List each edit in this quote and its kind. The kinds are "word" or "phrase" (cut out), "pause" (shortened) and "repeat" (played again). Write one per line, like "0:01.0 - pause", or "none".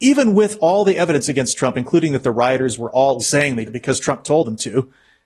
0:03.2 - word
0:03.7 - word